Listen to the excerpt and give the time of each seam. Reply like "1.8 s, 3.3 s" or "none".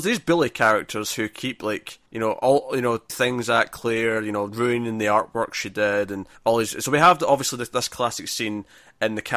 2.1 s, 3.1 s, 6.4 s